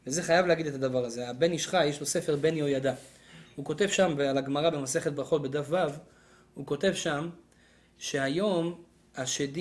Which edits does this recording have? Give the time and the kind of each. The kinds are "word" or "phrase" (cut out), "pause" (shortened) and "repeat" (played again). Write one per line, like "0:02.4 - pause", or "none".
none